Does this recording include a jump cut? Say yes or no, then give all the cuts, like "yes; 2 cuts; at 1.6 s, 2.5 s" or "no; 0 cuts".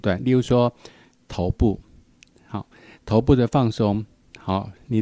no; 0 cuts